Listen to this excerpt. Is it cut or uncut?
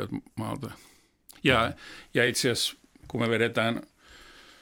uncut